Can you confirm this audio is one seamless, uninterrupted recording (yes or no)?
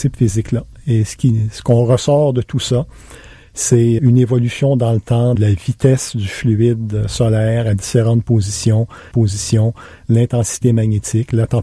no